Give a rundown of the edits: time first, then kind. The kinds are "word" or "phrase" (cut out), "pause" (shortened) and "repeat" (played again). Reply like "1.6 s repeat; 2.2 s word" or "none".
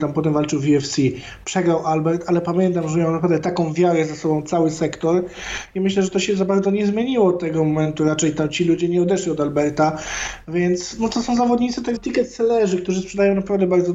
12.0 s word